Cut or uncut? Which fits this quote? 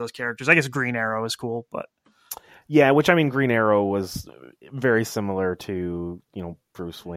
uncut